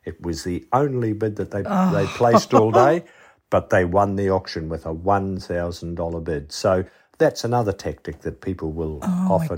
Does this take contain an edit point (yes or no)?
no